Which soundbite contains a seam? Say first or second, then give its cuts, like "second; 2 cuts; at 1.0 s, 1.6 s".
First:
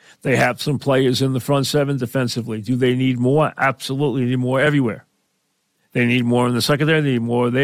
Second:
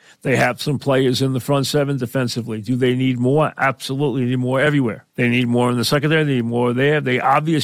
second; 1 cut; at 5.1 s